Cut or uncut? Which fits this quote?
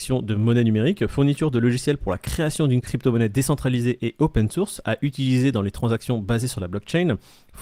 uncut